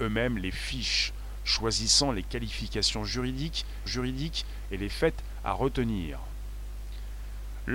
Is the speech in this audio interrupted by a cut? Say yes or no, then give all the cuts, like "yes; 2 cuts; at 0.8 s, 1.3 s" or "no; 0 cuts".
yes; 1 cut; at 3.9 s